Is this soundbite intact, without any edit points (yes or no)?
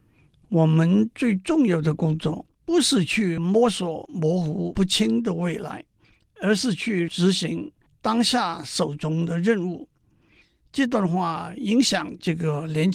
no